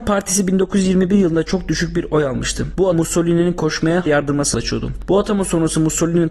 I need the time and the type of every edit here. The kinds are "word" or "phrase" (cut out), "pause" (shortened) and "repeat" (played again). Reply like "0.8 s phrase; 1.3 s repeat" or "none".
2.9 s word; 4.1 s word; 4.5 s word